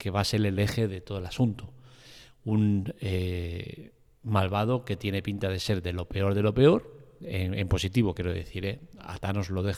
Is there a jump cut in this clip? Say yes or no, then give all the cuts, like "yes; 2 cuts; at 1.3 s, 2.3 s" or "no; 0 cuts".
no; 0 cuts